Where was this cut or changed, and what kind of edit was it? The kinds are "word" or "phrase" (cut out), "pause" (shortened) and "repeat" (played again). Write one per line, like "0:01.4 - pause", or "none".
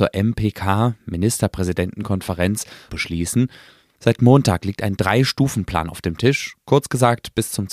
0:02.9 - phrase